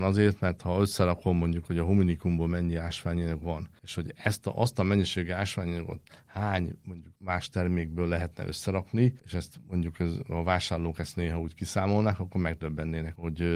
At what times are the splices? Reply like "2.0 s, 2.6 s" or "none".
none